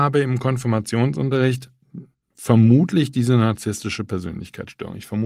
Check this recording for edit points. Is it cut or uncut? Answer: uncut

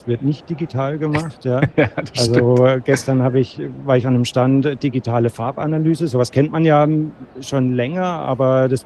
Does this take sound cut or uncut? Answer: uncut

